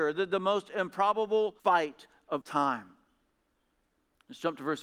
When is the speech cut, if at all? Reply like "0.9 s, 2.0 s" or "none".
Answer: 1.6 s, 2.4 s